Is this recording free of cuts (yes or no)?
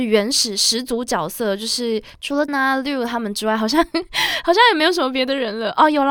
no